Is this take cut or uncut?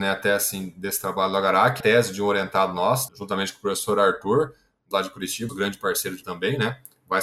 cut